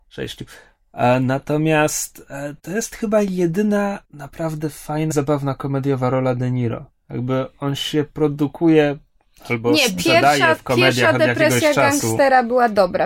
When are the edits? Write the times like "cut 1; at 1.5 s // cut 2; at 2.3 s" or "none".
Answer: cut 1; at 2.6 s // cut 2; at 4.0 s // cut 3; at 5.1 s